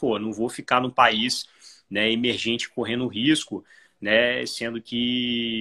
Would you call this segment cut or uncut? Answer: uncut